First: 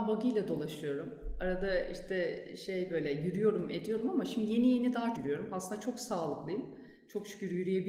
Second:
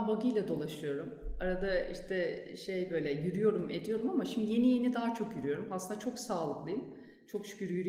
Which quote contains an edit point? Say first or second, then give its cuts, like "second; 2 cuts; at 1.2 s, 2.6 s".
first; 1 cut; at 5.1 s